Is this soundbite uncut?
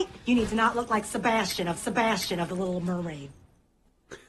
no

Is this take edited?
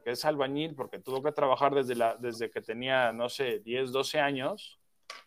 no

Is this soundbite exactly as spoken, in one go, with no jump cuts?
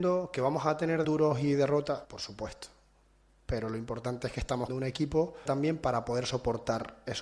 no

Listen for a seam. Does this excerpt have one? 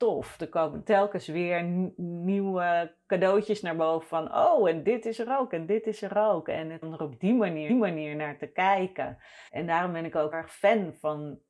yes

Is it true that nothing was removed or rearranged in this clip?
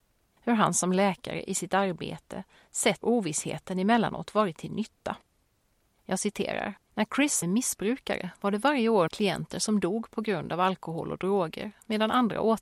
no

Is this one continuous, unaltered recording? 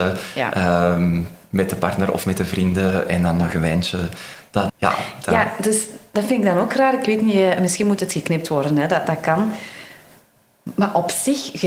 no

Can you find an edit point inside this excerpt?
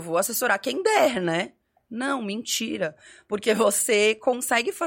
no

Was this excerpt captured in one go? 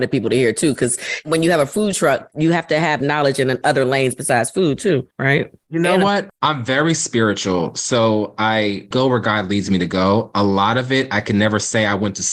yes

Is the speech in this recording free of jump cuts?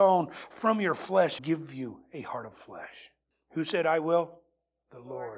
no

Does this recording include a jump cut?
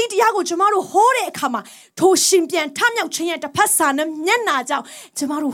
no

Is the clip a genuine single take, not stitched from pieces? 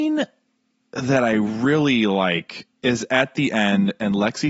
no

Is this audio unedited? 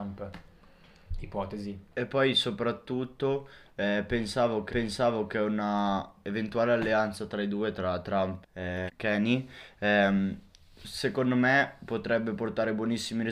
no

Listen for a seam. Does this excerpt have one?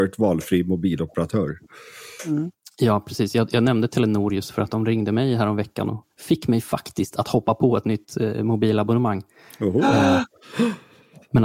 no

